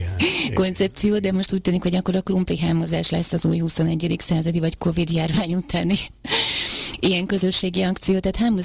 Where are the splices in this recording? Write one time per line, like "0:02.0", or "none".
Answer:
none